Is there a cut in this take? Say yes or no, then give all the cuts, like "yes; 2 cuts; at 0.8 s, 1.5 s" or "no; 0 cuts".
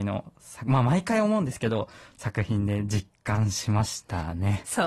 no; 0 cuts